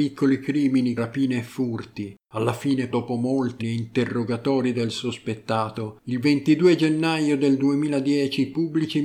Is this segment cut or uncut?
cut